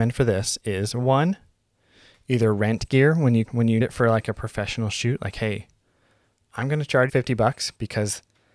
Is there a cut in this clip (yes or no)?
yes